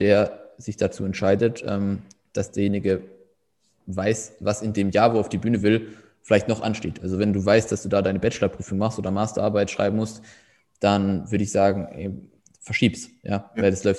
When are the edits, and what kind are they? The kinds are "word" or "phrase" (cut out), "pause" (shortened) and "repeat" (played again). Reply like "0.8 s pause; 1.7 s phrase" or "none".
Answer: none